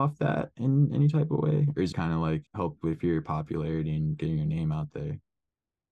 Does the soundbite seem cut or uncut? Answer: cut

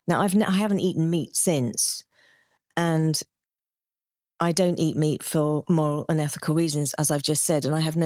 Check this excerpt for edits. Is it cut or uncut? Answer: uncut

